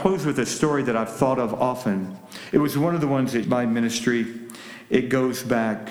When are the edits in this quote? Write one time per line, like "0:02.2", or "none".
0:03.4

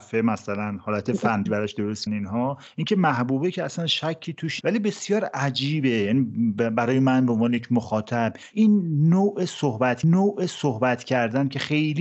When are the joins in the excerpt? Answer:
0:01.5
0:02.1
0:04.6
0:08.5
0:10.0

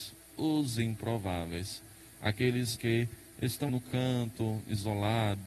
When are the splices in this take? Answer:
0:02.8
0:03.7

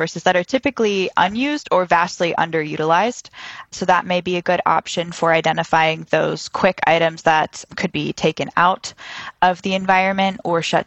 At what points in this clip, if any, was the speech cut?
0:07.9

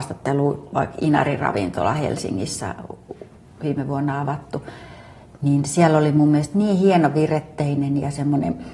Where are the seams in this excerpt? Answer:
0:03.4

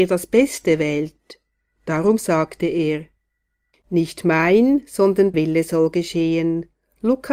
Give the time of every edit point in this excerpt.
0:05.3

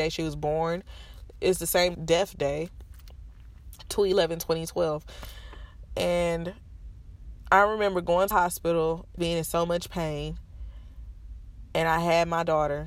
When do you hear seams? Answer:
0:01.9
0:08.3
0:09.2

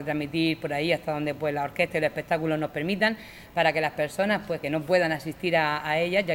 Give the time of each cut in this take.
0:04.6

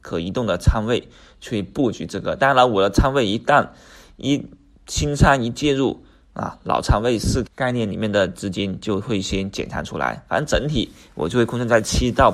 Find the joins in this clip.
0:07.4

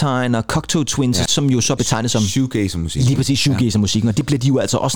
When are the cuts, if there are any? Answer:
0:01.3
0:01.8

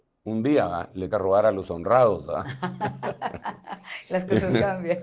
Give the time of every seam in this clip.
0:01.1

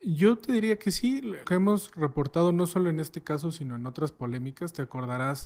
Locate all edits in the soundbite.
0:01.4

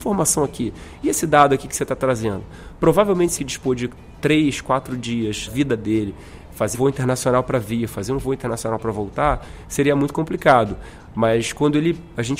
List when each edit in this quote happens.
0:03.4
0:05.5
0:06.7

